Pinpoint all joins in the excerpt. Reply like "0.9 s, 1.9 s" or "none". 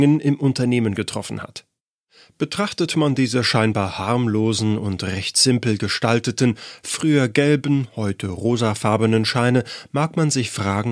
none